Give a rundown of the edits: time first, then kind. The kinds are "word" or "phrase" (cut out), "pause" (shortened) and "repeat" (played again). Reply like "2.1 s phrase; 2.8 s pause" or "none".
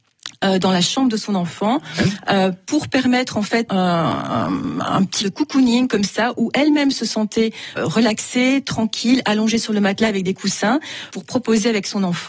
3.7 s word; 5.2 s word; 7.8 s word; 11.1 s word